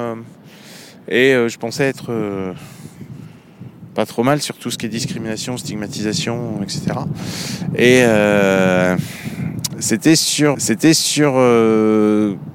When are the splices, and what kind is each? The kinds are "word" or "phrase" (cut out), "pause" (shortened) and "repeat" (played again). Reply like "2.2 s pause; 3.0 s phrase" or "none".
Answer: 10.5 s repeat